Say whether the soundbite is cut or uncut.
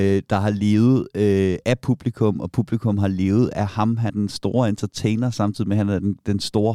cut